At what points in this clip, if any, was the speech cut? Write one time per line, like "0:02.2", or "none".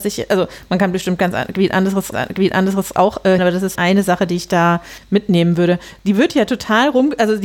0:02.1
0:03.4
0:03.8